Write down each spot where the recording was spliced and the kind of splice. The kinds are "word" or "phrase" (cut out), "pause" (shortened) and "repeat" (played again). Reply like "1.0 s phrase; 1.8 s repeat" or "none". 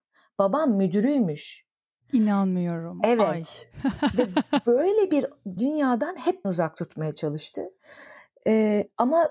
5.6 s word; 6.4 s word